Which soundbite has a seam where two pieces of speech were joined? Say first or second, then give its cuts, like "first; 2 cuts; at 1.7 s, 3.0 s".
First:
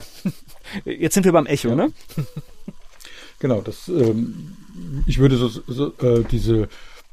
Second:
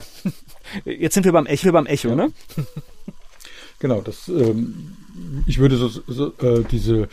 second; 1 cut; at 1.6 s